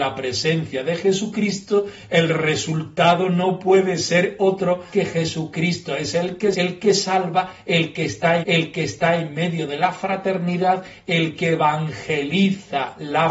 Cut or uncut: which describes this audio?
cut